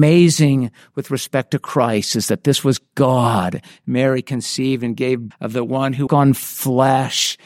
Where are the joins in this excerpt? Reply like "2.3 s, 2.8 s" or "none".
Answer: 5.3 s, 6.1 s